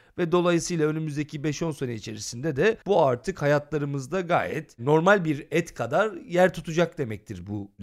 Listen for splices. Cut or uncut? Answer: cut